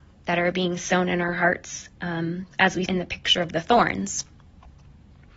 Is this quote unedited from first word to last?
no; 2 cuts; at 2.5 s, 2.9 s

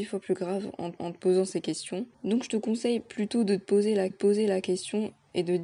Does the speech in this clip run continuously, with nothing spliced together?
no; 3 cuts; at 1.0 s, 2.1 s, 4.1 s

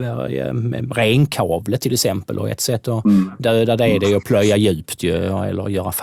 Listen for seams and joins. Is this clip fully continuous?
yes; 0 cuts

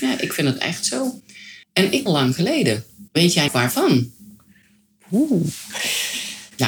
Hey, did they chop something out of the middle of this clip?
yes; 4 cuts; at 1.6 s, 2.1 s, 3.1 s, 3.5 s

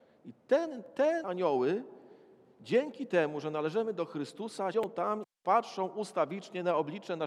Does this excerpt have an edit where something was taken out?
yes; 2 cuts; at 1.2 s, 4.7 s

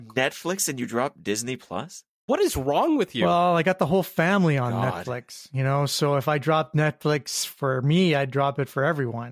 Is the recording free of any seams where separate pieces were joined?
yes; 0 cuts

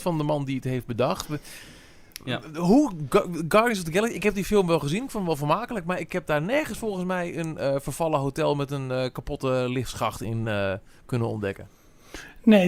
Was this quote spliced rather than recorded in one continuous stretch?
no; 0 cuts

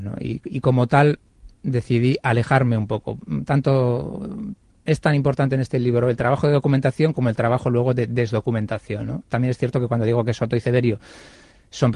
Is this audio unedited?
yes; 0 cuts

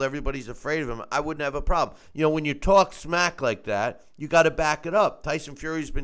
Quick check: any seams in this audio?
no; 0 cuts

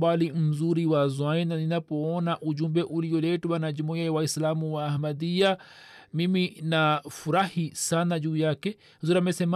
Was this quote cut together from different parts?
no; 0 cuts

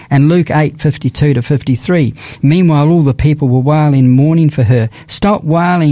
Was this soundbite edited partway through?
no; 0 cuts

